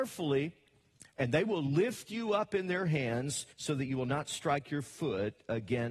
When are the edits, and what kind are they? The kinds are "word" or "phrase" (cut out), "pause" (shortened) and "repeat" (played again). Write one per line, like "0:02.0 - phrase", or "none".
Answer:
0:03.5 - pause